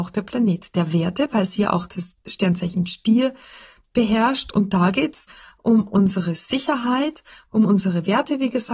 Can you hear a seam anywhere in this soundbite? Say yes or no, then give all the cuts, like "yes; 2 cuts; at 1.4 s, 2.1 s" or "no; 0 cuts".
no; 0 cuts